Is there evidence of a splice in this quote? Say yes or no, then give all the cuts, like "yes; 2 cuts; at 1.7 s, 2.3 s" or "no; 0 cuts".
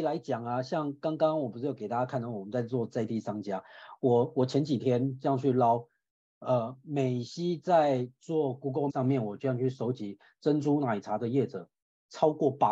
yes; 1 cut; at 8.9 s